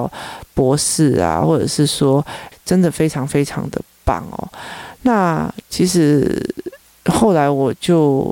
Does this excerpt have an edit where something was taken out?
yes; 1 cut; at 2.5 s

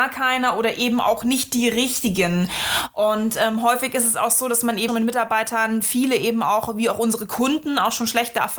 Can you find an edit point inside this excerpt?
yes; 1 cut; at 4.9 s

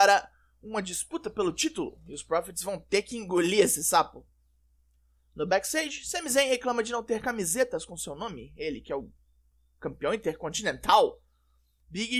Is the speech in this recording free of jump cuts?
yes; 0 cuts

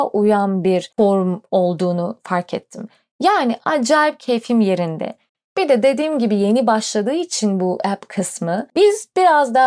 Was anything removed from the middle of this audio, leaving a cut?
no; 0 cuts

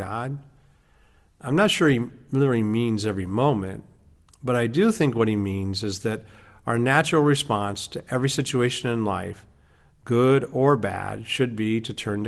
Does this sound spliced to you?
no; 0 cuts

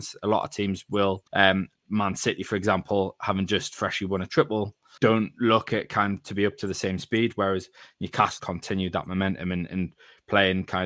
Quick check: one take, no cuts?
no; 3 cuts; at 1.3 s, 5.0 s, 8.4 s

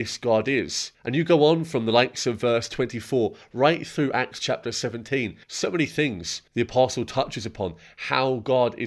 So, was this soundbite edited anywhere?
yes; 3 cuts; at 0.9 s, 5.4 s, 6.5 s

